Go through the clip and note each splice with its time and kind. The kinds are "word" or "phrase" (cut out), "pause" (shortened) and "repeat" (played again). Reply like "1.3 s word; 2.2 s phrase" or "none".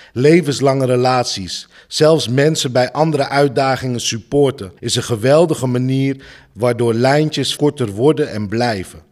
4.8 s pause; 7.6 s word